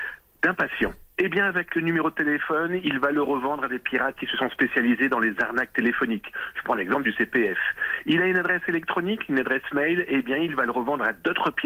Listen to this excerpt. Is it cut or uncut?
uncut